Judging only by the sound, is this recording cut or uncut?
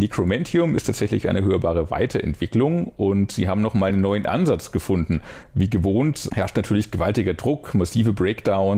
uncut